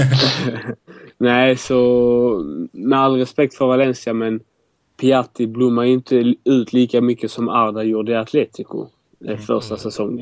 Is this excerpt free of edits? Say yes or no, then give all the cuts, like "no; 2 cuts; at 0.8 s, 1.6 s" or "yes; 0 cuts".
yes; 0 cuts